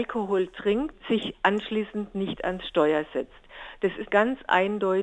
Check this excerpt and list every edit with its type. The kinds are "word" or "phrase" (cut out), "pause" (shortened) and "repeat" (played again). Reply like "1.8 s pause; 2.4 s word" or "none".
4.1 s word